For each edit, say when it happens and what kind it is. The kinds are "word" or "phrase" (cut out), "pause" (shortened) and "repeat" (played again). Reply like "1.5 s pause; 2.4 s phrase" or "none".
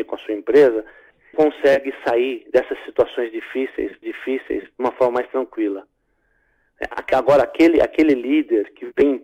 1.3 s word; 4.0 s repeat